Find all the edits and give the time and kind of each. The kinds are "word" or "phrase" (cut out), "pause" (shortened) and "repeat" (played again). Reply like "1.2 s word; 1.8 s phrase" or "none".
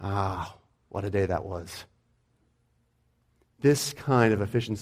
none